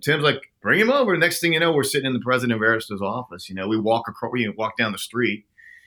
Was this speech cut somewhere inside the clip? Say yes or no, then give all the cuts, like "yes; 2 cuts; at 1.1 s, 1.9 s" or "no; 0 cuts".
no; 0 cuts